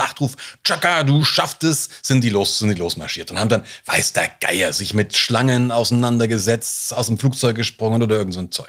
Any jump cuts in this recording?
no; 0 cuts

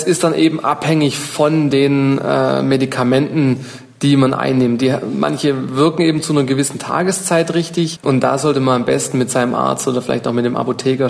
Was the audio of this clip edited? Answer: no; 0 cuts

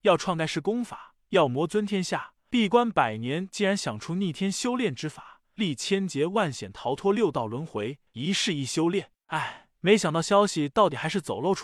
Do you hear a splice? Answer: yes; 1 cut; at 8.1 s

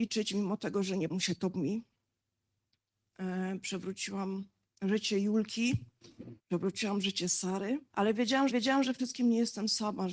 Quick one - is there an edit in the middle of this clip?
yes; 7 cuts; at 1.1 s, 1.5 s, 4.6 s, 6.4 s, 7.9 s, 8.5 s, 9.0 s

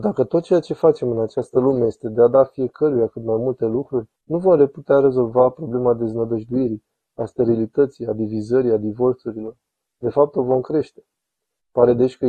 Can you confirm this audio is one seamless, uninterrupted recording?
no; 1 cut; at 4.2 s

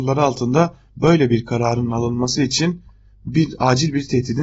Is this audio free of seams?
yes; 0 cuts

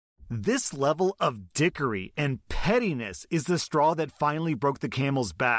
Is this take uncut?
yes; 0 cuts

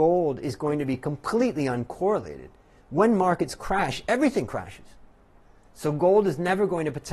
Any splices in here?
no; 0 cuts

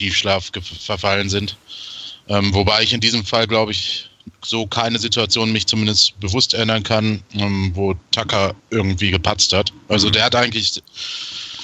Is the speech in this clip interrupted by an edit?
yes; 1 cut; at 8.6 s

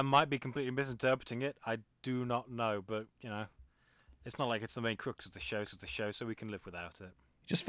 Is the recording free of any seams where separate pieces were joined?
no; 2 cuts; at 3.1 s, 5.6 s

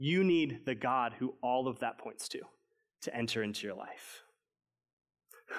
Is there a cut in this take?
no; 0 cuts

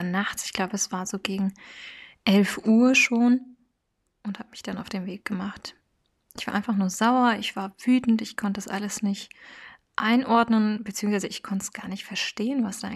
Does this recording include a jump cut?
no; 0 cuts

